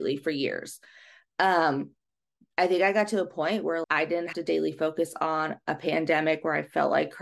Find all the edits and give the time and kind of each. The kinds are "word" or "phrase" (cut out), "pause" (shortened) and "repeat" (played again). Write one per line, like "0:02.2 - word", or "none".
0:03.8 - word
0:04.3 - word